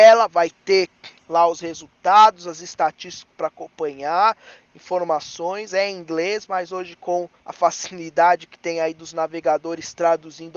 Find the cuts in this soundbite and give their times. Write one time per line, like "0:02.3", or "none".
0:07.4